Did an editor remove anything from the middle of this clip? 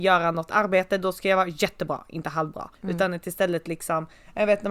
yes; 1 cut; at 2.7 s

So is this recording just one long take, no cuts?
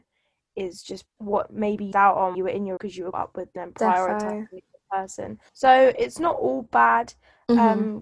no; 7 cuts; at 1.1 s, 1.9 s, 2.3 s, 2.8 s, 3.1 s, 3.6 s, 5.5 s

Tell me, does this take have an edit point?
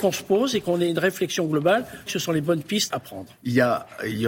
yes; 2 cuts; at 2.1 s, 2.9 s

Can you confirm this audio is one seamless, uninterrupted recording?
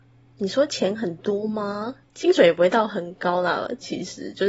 no; 1 cut; at 2.0 s

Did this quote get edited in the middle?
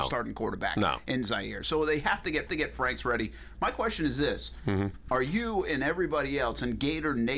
yes; 1 cut; at 2.5 s

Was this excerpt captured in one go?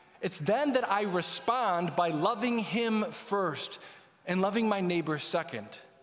yes; 0 cuts

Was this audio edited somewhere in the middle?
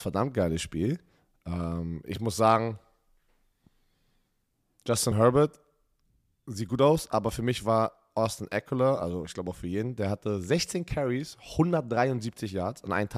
no; 0 cuts

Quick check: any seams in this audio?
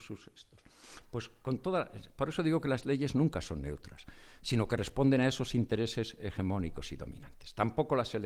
no; 0 cuts

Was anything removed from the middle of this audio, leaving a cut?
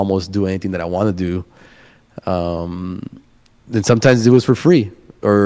no; 0 cuts

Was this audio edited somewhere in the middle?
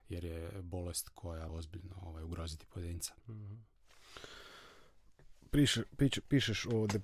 yes; 2 cuts; at 1.5 s, 3.2 s

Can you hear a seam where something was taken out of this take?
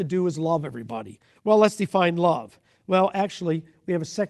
no; 0 cuts

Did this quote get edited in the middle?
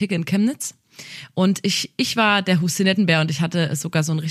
no; 0 cuts

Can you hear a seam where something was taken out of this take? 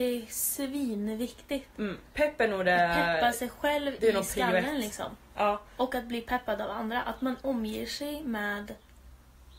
yes; 1 cut; at 7.4 s

